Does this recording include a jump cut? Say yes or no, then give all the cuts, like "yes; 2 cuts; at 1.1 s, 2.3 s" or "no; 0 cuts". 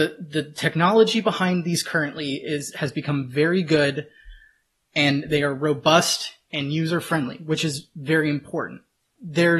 no; 0 cuts